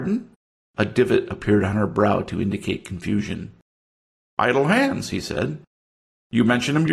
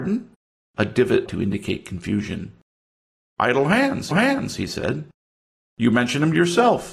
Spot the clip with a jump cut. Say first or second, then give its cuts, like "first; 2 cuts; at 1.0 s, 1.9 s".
second; 2 cuts; at 1.3 s, 4.1 s